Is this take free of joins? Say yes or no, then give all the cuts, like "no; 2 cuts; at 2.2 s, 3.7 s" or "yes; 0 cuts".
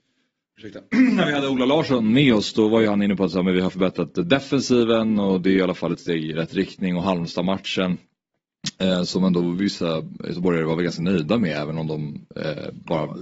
yes; 0 cuts